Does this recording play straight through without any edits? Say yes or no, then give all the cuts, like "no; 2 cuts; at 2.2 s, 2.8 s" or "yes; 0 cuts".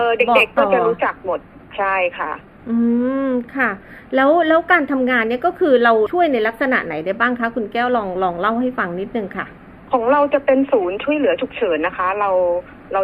yes; 0 cuts